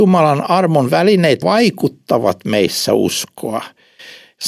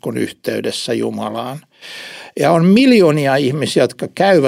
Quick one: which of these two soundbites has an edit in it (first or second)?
first